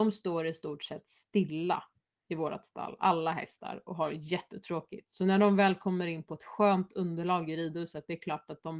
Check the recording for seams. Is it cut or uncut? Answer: uncut